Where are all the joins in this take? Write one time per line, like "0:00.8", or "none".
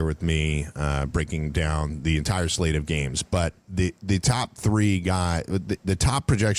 none

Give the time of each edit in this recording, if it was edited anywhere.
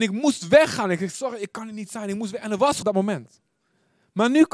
0:02.8

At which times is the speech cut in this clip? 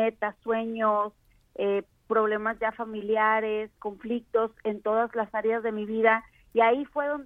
none

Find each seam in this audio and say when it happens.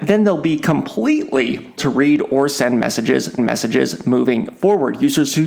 0:01.8
0:03.4

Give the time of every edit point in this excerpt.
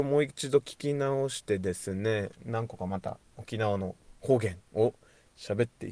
none

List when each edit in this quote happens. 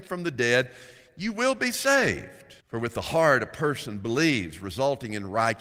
0:02.6

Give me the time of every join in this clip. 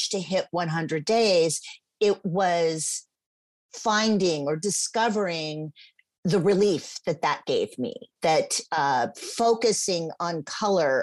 none

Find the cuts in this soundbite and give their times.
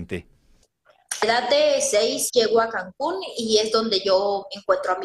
0:01.2
0:02.3

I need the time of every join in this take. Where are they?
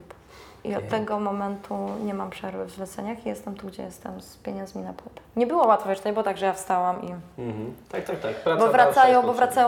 0:05.3
0:07.8

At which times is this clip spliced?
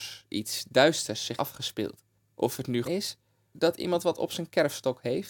0:01.4
0:02.2
0:02.8
0:03.5

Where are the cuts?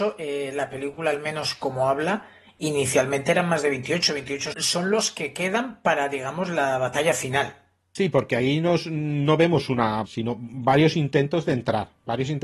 0:04.5
0:10.1

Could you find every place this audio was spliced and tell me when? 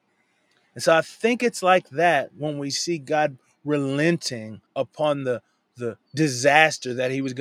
0:04.7

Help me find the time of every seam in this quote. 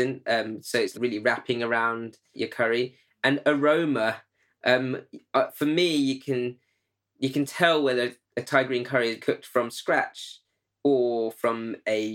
0:00.9
0:02.3
0:09.2

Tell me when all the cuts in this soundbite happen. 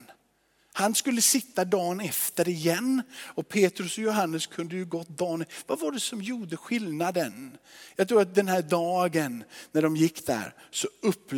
none

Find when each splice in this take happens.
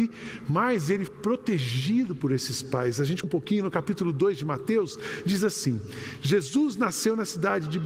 0:01.1
0:03.2

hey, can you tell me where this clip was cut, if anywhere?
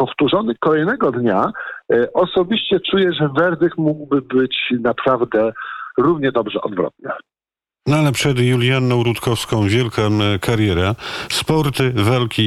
none

